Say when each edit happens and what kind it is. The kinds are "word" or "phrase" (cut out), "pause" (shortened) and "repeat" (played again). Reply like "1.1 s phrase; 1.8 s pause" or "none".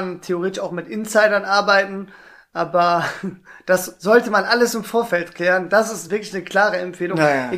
none